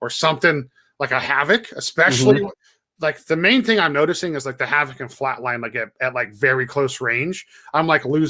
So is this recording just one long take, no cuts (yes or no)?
yes